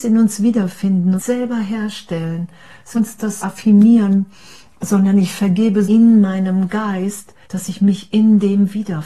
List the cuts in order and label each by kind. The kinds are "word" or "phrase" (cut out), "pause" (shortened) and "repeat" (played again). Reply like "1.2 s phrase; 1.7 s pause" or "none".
1.2 s phrase; 2.9 s phrase; 3.4 s word; 5.8 s phrase; 7.4 s pause